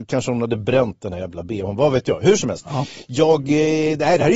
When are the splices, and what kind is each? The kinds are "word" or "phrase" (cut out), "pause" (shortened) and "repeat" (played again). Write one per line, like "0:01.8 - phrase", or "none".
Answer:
none